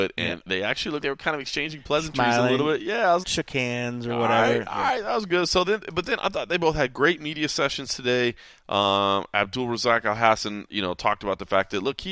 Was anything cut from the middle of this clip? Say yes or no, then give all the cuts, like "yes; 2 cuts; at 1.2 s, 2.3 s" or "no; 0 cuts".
yes; 3 cuts; at 1.0 s, 3.2 s, 10.7 s